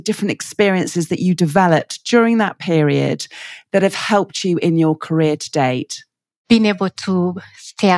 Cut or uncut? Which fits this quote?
uncut